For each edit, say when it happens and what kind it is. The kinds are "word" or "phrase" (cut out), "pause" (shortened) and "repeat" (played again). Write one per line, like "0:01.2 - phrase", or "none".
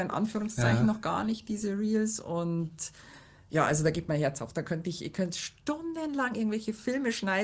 none